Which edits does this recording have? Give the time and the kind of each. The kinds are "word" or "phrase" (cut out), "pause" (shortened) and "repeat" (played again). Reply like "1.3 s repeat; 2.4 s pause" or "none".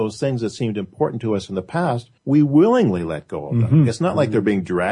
2.2 s pause